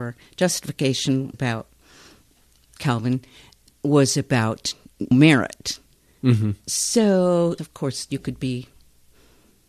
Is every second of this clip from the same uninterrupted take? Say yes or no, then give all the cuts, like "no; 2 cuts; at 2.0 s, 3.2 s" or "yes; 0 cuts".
no; 4 cuts; at 1.3 s, 2.8 s, 5.1 s, 7.6 s